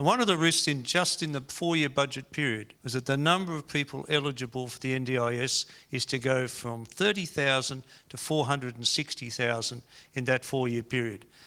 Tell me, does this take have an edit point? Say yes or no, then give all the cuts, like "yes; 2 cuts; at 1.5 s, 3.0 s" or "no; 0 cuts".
yes; 1 cut; at 2.8 s